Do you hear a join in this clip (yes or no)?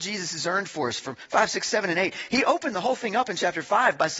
no